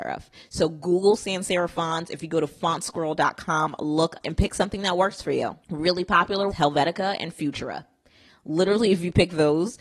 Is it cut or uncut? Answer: cut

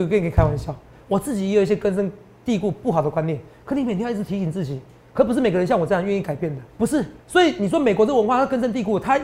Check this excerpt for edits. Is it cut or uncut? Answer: cut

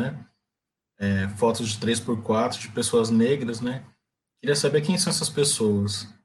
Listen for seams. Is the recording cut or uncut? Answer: uncut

